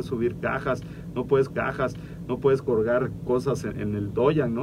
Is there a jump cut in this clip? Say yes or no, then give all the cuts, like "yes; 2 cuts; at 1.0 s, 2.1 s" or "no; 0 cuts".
yes; 2 cuts; at 1.5 s, 3.7 s